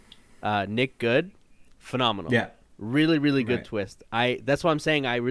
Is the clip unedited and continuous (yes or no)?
yes